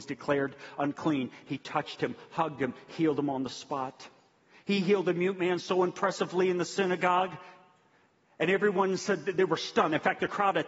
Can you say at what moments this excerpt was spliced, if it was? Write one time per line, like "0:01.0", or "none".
none